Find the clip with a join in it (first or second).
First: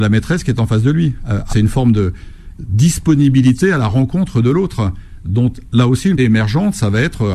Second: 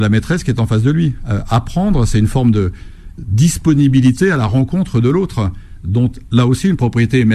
first